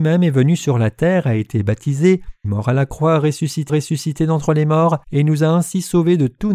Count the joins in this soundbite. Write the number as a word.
three